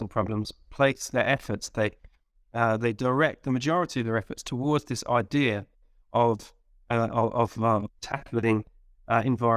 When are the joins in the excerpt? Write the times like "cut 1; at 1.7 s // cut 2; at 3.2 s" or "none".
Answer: none